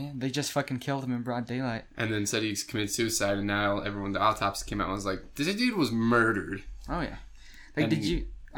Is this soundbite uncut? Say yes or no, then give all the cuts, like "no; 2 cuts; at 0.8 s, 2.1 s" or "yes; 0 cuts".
yes; 0 cuts